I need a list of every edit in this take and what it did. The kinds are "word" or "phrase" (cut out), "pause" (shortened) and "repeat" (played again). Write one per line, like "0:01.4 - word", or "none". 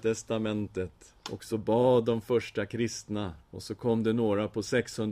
0:01.2 - pause
0:03.4 - pause